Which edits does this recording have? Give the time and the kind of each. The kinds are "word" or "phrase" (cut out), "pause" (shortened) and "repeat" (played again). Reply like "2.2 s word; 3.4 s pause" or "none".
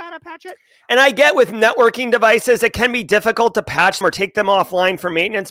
4.0 s word